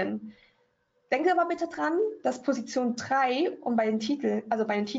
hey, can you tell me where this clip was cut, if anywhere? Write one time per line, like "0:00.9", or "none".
none